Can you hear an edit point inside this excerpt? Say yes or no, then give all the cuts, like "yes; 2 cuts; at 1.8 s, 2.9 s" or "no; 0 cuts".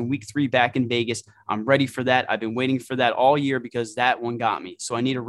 no; 0 cuts